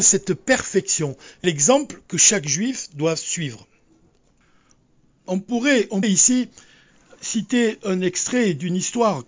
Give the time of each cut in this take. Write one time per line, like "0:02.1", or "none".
0:01.4
0:06.0